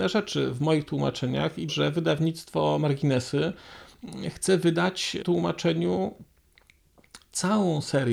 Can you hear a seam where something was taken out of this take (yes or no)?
yes